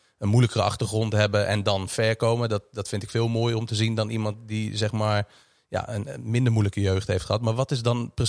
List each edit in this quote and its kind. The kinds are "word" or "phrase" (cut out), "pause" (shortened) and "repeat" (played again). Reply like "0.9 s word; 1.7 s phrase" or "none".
none